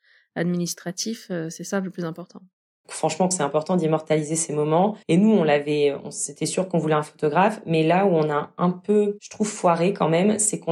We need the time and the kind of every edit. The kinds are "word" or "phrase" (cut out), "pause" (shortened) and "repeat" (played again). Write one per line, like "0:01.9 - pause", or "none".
0:03.3 - word
0:05.0 - pause